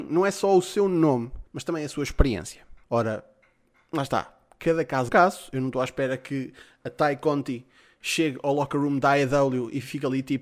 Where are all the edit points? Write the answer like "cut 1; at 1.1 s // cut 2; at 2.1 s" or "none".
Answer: cut 1; at 1.5 s // cut 2; at 2.8 s // cut 3; at 5.1 s